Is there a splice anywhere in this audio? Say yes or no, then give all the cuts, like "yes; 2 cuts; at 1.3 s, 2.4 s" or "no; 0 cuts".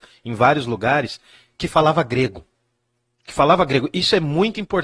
no; 0 cuts